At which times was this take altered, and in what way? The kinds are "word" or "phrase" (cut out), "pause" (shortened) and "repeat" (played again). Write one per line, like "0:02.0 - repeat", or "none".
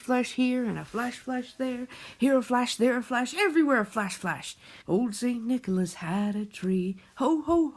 0:04.8 - pause